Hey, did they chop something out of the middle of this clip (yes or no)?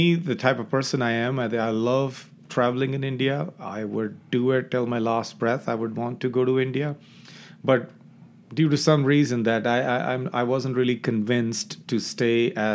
no